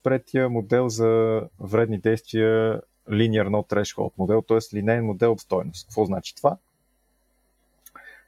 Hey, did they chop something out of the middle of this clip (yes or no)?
yes